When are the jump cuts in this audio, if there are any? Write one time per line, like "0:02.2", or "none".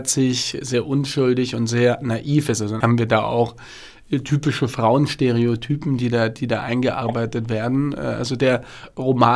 0:02.8